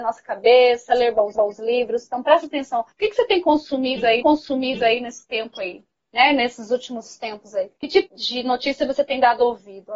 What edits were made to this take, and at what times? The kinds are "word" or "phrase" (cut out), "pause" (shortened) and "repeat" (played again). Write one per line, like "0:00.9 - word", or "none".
0:01.4 - repeat
0:02.9 - pause
0:04.2 - repeat
0:07.8 - pause
0:08.1 - word